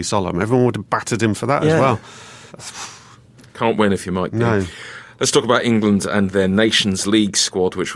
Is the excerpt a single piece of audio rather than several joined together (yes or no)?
no